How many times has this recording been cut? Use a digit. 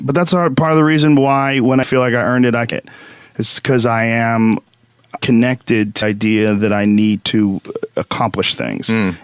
5